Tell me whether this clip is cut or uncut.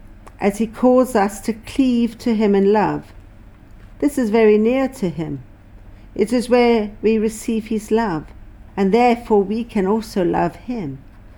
cut